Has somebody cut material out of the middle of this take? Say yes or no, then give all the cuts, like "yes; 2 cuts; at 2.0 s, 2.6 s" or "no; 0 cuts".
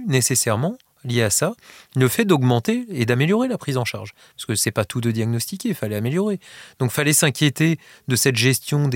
no; 0 cuts